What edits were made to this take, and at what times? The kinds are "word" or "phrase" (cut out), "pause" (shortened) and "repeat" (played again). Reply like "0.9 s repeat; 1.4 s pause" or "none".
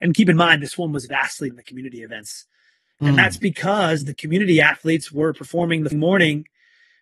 1.5 s word; 5.9 s word